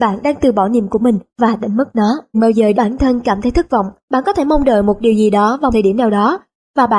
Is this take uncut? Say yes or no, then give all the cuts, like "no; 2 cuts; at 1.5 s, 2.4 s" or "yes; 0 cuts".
no; 6 cuts; at 0.9 s, 1.3 s, 2.3 s, 2.7 s, 4.0 s, 5.7 s